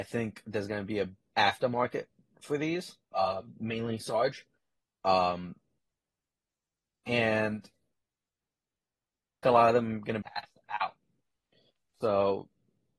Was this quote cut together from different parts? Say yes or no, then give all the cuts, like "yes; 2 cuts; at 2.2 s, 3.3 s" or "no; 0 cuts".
yes; 5 cuts; at 1.3 s, 3.0 s, 6.5 s, 9.4 s, 10.2 s